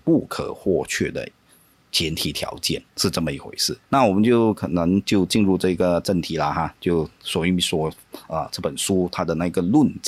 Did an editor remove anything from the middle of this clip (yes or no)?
yes